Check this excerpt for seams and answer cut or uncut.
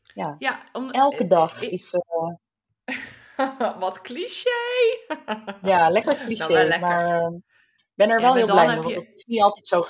uncut